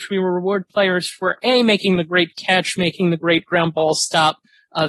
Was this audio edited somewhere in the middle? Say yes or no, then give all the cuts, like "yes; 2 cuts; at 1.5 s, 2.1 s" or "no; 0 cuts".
no; 0 cuts